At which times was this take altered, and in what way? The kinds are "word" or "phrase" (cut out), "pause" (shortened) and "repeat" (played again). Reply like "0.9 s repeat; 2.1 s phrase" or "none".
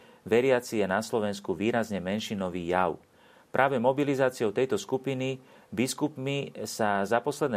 none